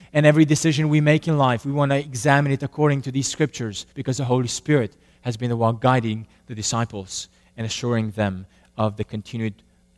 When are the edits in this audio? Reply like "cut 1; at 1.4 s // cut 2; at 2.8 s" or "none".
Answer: cut 1; at 3.9 s